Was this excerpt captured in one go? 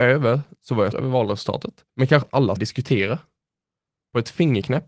no; 4 cuts; at 0.9 s, 1.9 s, 2.2 s, 2.6 s

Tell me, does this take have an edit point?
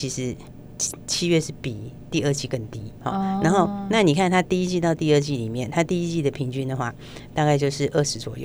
no; 0 cuts

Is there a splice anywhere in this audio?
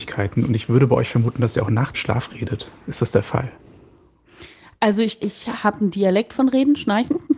yes; 2 cuts; at 1.9 s, 5.2 s

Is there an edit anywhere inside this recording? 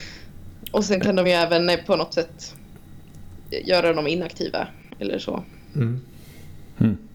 no; 0 cuts

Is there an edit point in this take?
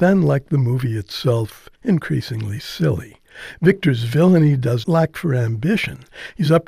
yes; 2 cuts; at 1.8 s, 4.8 s

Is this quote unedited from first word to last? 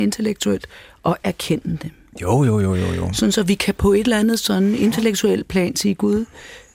yes; 0 cuts

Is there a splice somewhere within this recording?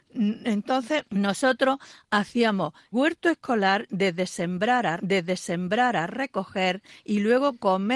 yes; 3 cuts; at 1.1 s, 2.9 s, 5.0 s

